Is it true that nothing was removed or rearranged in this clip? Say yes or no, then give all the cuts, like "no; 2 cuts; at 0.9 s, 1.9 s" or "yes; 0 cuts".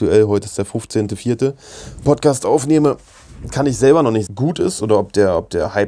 no; 2 cuts; at 2.0 s, 4.3 s